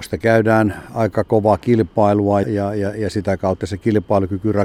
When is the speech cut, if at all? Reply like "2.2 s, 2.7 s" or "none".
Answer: 2.4 s, 3.6 s